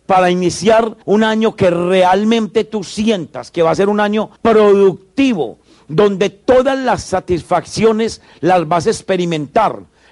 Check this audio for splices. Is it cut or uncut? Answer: cut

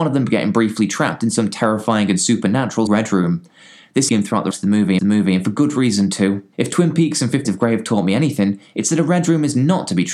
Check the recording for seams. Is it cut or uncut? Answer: cut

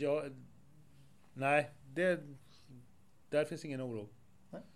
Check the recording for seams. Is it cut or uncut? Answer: uncut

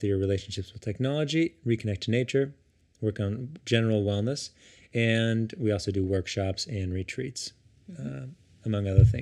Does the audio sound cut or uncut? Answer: uncut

